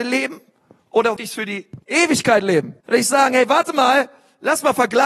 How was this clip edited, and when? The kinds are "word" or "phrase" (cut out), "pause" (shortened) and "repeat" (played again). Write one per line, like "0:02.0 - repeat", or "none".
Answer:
0:01.2 - word
0:01.8 - pause
0:02.8 - pause

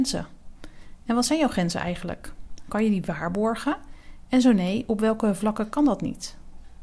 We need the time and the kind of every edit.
none

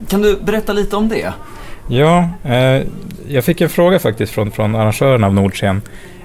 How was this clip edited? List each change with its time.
none

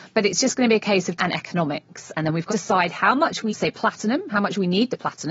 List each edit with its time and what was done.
0:01.2 - word
0:02.5 - word
0:03.5 - word

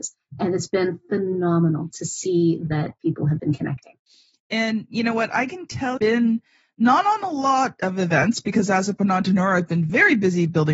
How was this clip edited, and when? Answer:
0:02.7 - word
0:04.1 - pause
0:06.0 - phrase

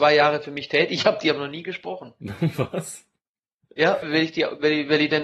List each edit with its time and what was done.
0:04.0 - word

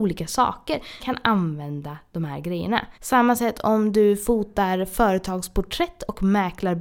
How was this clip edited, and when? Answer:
0:01.0 - word
0:02.9 - pause

